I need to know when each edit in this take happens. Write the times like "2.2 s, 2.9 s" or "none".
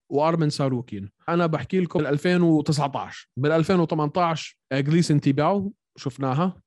1.3 s, 2.0 s, 4.6 s